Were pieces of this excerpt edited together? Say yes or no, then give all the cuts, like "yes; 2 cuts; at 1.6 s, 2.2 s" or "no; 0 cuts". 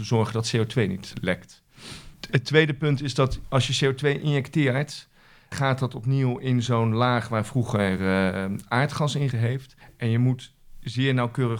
yes; 4 cuts; at 1.1 s, 5.5 s, 9.3 s, 9.8 s